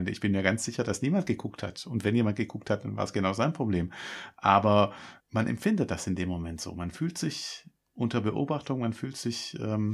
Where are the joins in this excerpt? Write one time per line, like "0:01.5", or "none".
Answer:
0:05.2